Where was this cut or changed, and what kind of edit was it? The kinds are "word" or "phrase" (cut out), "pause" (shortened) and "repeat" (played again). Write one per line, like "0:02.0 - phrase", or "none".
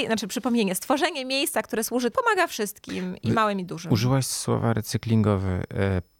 0:02.1 - phrase